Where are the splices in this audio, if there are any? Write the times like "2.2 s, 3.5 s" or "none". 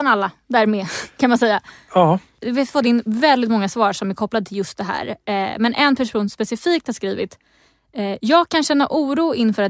none